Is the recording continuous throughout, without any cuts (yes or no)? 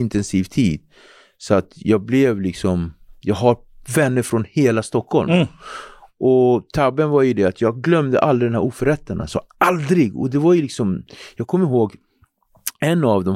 yes